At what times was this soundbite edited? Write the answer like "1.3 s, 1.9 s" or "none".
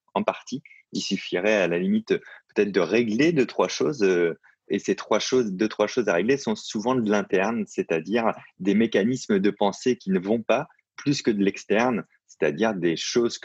none